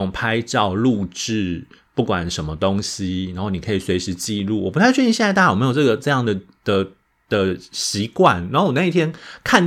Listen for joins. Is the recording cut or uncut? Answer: uncut